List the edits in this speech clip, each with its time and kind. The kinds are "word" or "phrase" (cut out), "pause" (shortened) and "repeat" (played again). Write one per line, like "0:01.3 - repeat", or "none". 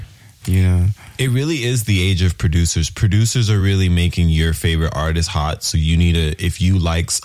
none

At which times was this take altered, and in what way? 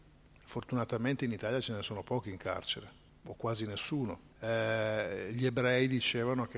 0:03.1 - pause
0:04.3 - pause

